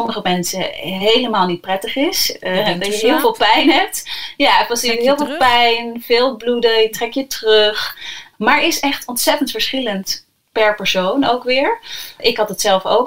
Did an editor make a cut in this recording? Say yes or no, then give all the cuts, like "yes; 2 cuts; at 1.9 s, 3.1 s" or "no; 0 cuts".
no; 0 cuts